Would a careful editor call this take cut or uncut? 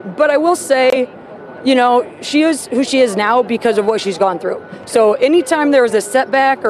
uncut